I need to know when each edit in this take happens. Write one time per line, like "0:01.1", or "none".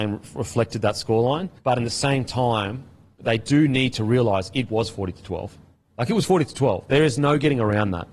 0:01.6